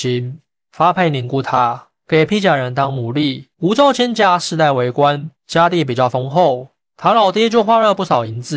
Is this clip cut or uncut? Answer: cut